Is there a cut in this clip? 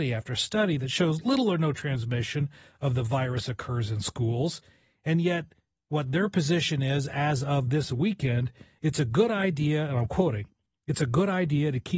no; 0 cuts

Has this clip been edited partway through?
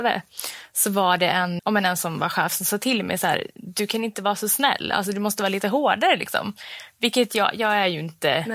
yes; 1 cut; at 1.6 s

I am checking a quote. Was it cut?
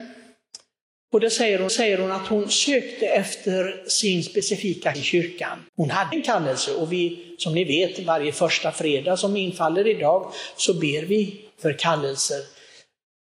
yes; 4 cuts; at 1.7 s, 4.9 s, 5.7 s, 6.1 s

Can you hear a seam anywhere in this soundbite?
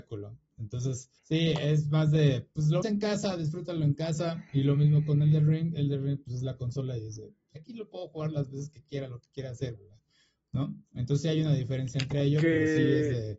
yes; 6 cuts; at 1.2 s, 2.8 s, 4.5 s, 7.6 s, 9.8 s, 10.9 s

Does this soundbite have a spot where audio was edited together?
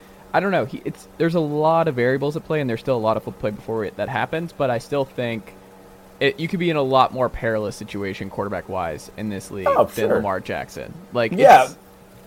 yes; 1 cut; at 3.4 s

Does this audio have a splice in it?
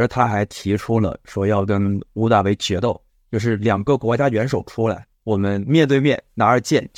yes; 2 cuts; at 3.1 s, 5.1 s

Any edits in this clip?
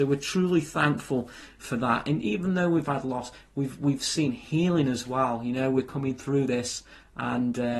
no; 0 cuts

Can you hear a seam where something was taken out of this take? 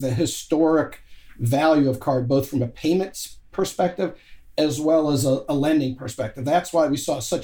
no; 0 cuts

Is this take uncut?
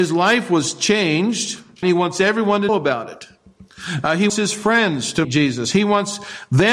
no; 4 cuts; at 1.8 s, 2.7 s, 4.3 s, 5.2 s

